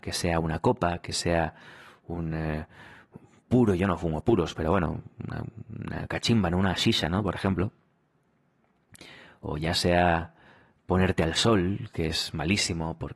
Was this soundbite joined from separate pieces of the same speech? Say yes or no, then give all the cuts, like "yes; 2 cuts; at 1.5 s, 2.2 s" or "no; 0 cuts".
no; 0 cuts